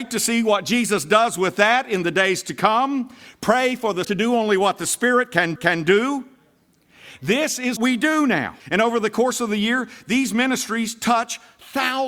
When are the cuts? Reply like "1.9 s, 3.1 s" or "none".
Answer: 4.0 s, 5.6 s, 7.8 s, 8.6 s

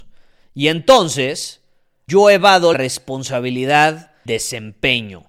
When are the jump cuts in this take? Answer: 2.1 s, 2.7 s, 4.3 s

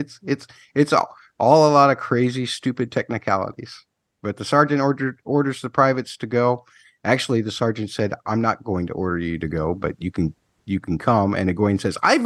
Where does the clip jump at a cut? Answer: none

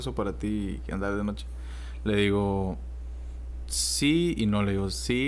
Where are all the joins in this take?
none

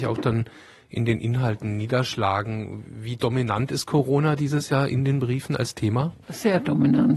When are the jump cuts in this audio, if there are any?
none

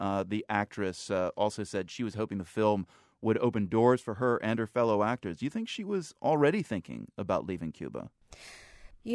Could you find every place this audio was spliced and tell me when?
none

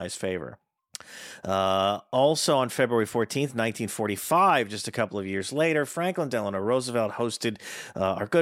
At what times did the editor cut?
none

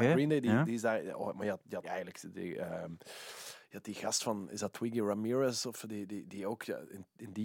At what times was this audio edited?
1.8 s

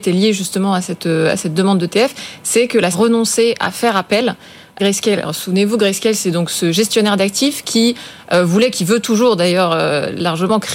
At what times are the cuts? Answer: 2.9 s, 4.8 s

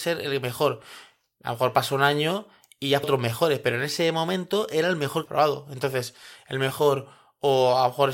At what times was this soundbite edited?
3.0 s, 5.3 s

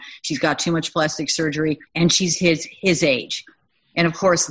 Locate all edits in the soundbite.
1.9 s

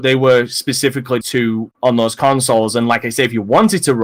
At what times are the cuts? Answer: 1.2 s, 1.7 s

